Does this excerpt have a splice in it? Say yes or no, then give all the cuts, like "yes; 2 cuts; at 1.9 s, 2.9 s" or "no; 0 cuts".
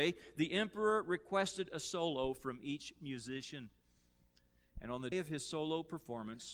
yes; 1 cut; at 5.1 s